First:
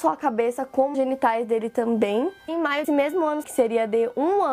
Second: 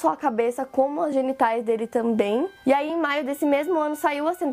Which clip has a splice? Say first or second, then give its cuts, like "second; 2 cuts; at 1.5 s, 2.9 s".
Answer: first; 4 cuts; at 0.9 s, 2.5 s, 2.8 s, 3.4 s